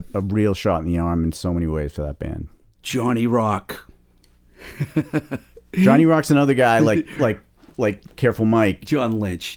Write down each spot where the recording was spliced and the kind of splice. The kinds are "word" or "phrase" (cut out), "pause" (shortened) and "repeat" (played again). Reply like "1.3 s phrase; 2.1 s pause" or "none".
none